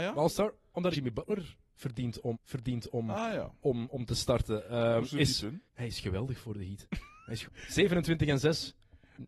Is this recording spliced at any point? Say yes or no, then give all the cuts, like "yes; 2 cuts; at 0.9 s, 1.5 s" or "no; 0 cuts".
yes; 4 cuts; at 0.9 s, 2.3 s, 5.7 s, 7.4 s